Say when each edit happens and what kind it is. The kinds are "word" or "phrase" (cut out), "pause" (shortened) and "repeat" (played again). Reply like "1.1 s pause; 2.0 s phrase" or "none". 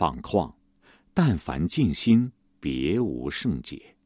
2.4 s pause